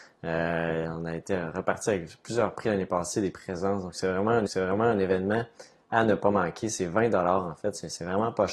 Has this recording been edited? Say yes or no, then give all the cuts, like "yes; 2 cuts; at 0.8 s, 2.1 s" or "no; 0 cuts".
yes; 2 cuts; at 3.3 s, 4.5 s